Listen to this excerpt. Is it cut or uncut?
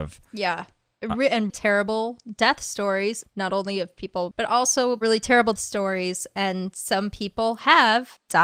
cut